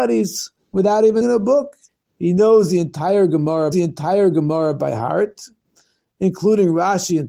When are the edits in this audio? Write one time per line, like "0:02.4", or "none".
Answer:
0:01.2
0:01.9
0:03.7